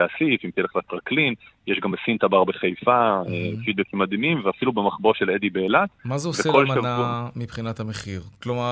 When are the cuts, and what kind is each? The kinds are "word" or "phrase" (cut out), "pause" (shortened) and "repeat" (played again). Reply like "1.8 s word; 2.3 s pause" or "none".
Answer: none